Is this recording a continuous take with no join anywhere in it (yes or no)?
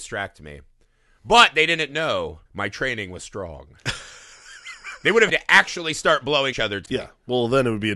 no